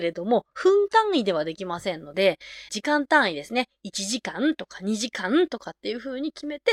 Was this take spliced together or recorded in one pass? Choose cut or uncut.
cut